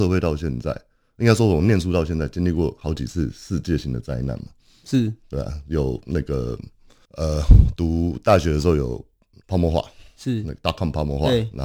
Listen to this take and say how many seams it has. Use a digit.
0